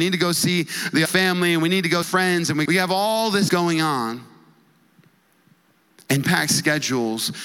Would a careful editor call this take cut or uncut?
cut